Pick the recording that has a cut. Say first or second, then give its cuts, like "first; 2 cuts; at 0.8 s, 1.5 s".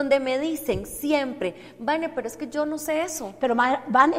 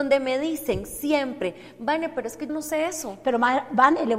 second; 1 cut; at 2.5 s